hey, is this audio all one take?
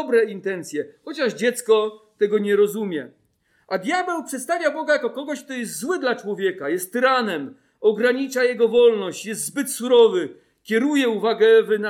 yes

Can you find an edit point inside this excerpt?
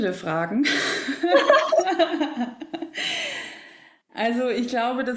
no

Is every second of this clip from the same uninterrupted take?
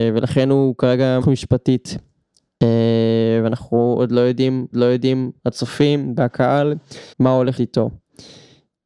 no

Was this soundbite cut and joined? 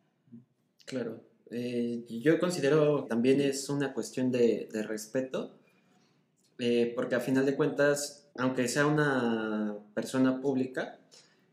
yes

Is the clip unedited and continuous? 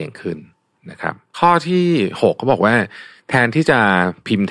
yes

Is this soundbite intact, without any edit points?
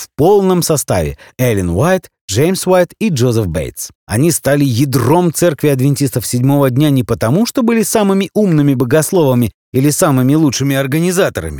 no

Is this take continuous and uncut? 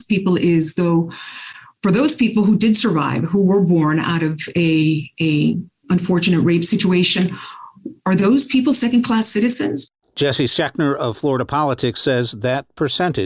yes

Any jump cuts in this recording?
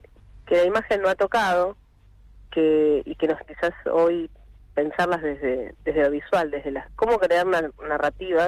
yes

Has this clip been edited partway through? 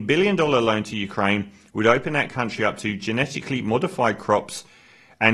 no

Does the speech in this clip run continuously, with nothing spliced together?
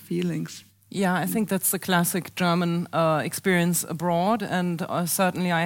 yes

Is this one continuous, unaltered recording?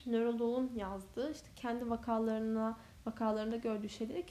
yes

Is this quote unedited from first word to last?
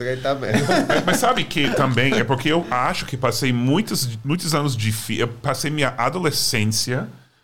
yes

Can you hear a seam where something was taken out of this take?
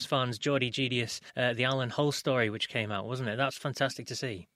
yes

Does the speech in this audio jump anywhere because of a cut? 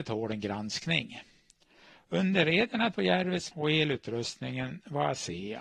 yes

